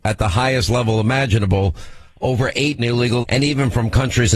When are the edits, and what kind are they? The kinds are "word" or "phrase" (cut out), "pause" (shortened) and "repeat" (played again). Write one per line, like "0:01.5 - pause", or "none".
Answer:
0:02.8 - word
0:03.2 - word